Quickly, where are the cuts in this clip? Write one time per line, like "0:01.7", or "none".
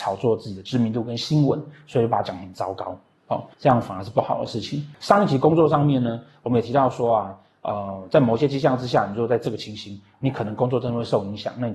0:03.5